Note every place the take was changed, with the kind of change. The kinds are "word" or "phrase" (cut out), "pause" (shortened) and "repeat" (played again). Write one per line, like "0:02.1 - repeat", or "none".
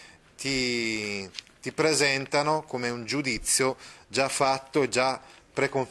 none